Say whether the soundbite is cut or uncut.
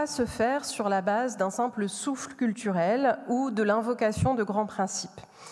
uncut